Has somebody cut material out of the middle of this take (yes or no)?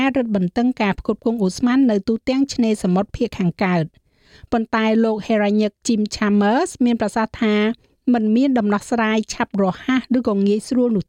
no